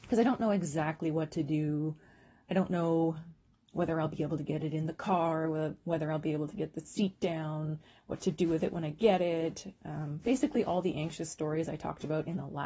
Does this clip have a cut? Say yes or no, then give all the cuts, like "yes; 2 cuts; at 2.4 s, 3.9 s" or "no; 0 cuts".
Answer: no; 0 cuts